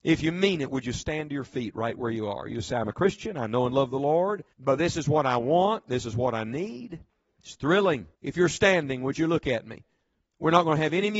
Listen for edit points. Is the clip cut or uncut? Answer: cut